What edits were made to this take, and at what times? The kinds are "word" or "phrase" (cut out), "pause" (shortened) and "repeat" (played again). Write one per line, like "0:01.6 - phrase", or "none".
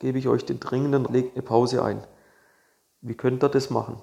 0:01.1 - word